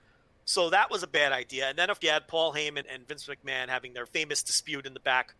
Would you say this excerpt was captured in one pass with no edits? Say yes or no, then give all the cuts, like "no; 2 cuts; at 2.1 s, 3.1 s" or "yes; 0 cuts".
no; 3 cuts; at 2.0 s, 2.8 s, 4.1 s